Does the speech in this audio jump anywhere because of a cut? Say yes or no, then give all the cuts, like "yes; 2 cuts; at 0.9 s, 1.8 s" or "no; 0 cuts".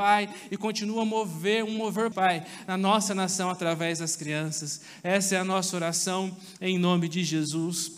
yes; 1 cut; at 2.1 s